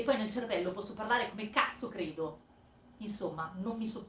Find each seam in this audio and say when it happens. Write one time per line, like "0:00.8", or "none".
none

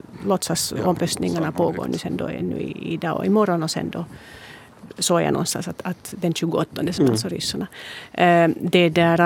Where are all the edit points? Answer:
0:07.0

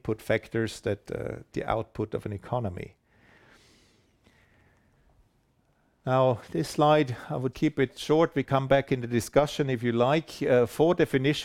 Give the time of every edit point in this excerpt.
0:01.5
0:07.5
0:08.4

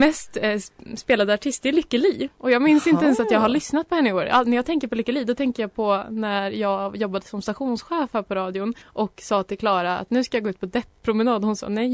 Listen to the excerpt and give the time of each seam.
0:08.8

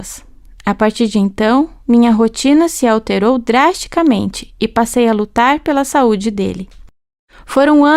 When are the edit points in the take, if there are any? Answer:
none

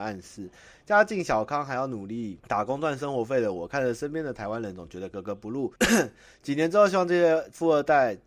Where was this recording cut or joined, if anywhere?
0:02.4
0:05.8

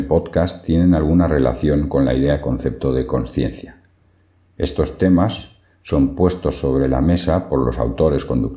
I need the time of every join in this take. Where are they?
none

